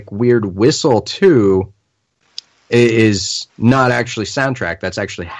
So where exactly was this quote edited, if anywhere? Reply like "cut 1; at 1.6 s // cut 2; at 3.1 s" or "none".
cut 1; at 3.5 s